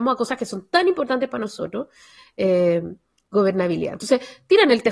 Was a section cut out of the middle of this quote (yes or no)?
yes